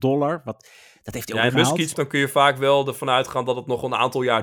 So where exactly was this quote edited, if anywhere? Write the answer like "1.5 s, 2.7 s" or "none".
1.5 s, 1.9 s